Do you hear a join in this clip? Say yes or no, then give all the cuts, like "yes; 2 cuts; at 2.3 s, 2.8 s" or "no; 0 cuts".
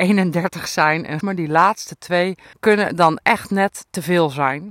yes; 2 cuts; at 1.2 s, 2.5 s